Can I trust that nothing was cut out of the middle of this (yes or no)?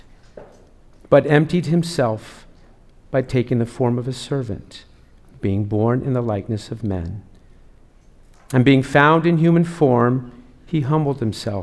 yes